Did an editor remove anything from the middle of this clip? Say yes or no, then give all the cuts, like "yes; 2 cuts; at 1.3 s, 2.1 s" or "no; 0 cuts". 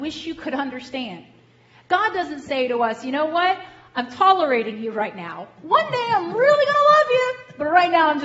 no; 0 cuts